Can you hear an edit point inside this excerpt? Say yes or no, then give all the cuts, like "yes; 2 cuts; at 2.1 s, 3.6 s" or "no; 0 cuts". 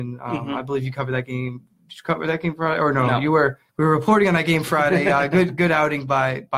yes; 1 cut; at 3.7 s